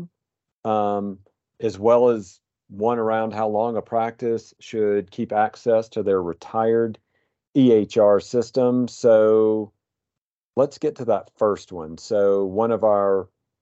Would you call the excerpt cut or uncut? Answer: uncut